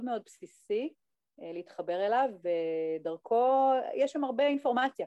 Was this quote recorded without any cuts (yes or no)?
yes